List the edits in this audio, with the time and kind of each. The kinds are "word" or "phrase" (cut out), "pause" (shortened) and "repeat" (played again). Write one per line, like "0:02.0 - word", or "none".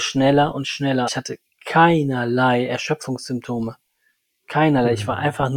0:01.1 - word